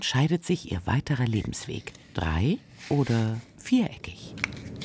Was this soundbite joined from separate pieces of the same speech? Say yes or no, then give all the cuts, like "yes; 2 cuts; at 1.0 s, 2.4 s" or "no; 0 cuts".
yes; 1 cut; at 2.0 s